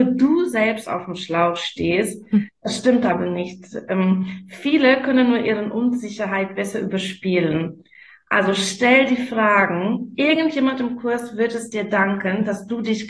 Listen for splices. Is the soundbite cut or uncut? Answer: uncut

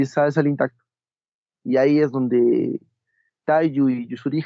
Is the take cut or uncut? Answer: uncut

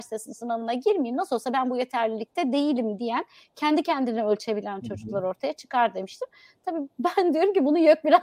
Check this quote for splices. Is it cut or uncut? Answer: uncut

